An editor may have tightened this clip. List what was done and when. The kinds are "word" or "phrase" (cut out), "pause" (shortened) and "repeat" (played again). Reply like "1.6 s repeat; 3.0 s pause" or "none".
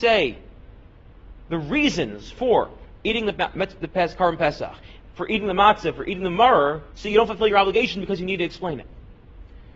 6.9 s pause